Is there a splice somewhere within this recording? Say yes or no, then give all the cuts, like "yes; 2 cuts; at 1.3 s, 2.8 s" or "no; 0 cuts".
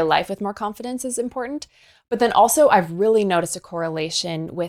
no; 0 cuts